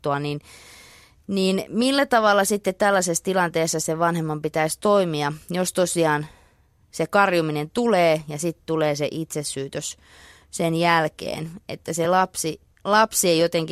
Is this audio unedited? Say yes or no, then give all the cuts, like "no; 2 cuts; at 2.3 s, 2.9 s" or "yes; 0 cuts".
yes; 0 cuts